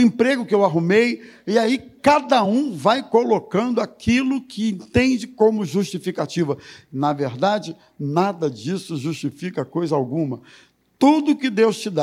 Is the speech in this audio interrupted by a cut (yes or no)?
no